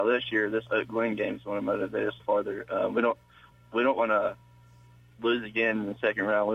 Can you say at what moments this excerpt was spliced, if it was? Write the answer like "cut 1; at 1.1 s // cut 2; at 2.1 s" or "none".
cut 1; at 2.2 s // cut 2; at 3.5 s